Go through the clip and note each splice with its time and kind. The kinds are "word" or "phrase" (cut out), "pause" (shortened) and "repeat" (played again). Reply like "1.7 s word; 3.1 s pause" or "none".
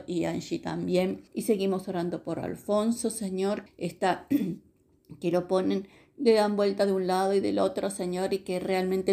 1.3 s pause; 3.7 s word